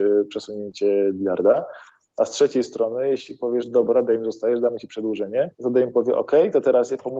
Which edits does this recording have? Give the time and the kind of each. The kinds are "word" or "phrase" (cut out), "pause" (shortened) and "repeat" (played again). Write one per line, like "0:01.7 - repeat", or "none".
0:05.5 - pause